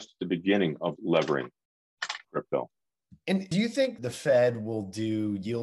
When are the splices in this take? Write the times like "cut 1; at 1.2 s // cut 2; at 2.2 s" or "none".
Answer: cut 1; at 1.0 s // cut 2; at 2.2 s // cut 3; at 3.5 s // cut 4; at 4.0 s